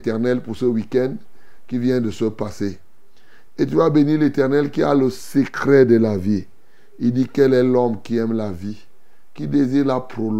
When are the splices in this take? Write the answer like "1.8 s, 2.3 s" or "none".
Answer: none